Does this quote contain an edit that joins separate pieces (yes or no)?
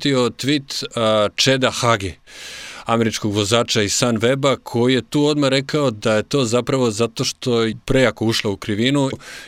no